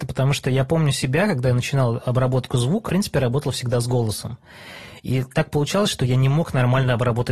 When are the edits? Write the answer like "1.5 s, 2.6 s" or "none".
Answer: 2.9 s

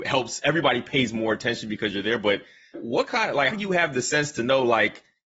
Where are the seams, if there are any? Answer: 2.7 s, 3.5 s

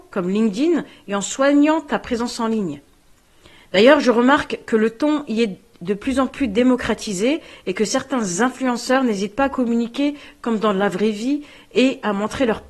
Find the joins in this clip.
none

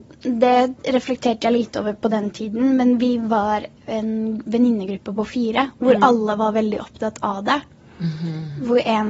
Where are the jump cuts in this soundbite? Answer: none

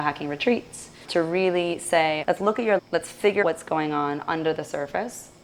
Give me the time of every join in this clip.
1.0 s, 2.2 s, 2.8 s, 3.4 s

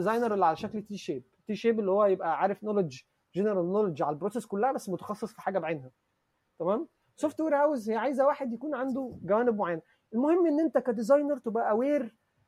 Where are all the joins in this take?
none

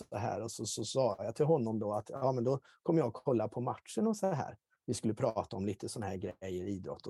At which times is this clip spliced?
none

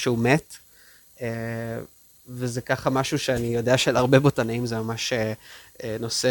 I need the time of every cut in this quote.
none

